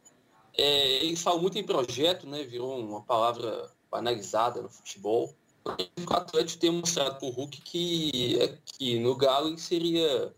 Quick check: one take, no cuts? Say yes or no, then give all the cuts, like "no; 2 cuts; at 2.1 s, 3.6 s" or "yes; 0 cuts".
no; 1 cut; at 5.5 s